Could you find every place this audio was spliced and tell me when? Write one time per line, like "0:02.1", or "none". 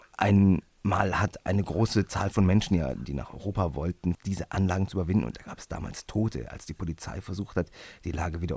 0:04.1